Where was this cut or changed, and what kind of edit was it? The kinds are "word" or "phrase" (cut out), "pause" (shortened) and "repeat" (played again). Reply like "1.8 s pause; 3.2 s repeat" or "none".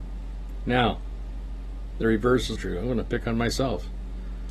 2.5 s word